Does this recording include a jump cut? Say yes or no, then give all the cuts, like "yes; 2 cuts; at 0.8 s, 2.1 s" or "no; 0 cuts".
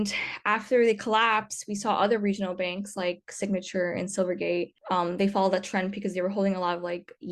no; 0 cuts